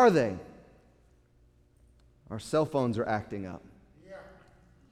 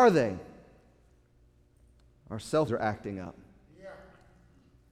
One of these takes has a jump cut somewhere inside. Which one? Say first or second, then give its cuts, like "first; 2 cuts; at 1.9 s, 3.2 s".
second; 1 cut; at 2.7 s